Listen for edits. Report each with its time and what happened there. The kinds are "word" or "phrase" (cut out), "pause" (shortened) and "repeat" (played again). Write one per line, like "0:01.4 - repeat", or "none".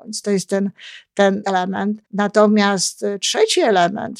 0:01.4 - word
0:02.1 - pause